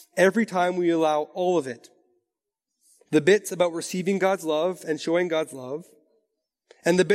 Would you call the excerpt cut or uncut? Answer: uncut